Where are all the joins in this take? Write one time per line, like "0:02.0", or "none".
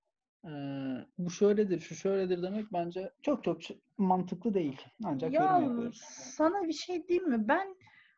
0:01.1
0:03.1
0:04.9